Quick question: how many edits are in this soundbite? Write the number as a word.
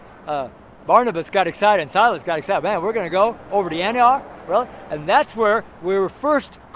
zero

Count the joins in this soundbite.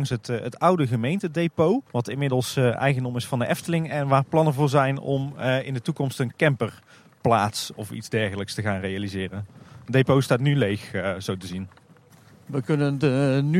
one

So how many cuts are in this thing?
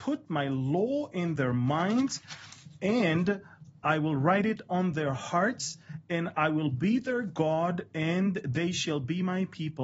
zero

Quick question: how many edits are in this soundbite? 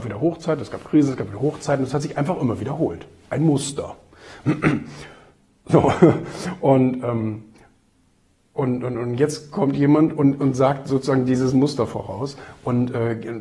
zero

